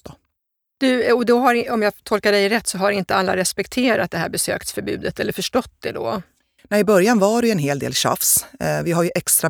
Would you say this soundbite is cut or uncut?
uncut